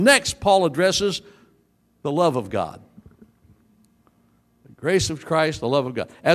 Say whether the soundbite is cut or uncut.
uncut